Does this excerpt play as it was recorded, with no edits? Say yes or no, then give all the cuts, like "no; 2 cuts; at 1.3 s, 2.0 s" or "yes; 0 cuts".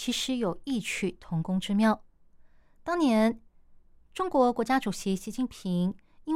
yes; 0 cuts